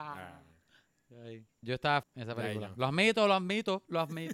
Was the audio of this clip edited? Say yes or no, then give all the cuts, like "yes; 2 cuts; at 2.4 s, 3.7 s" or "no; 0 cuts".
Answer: yes; 2 cuts; at 1.6 s, 2.0 s